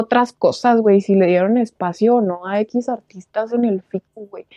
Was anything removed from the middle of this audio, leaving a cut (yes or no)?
no